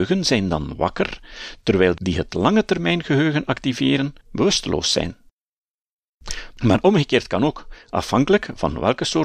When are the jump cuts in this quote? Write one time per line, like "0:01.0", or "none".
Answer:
0:02.0
0:04.2